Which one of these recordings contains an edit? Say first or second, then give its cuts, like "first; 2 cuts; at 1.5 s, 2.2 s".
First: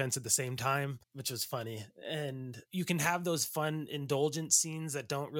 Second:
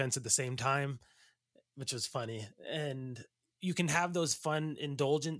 first; 2 cuts; at 1.0 s, 2.7 s